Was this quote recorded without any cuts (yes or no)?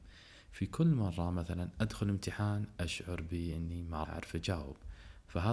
no